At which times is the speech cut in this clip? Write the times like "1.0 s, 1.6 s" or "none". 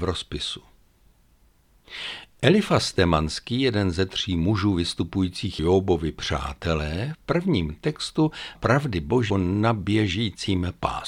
5.6 s, 7.1 s, 8.5 s, 9.3 s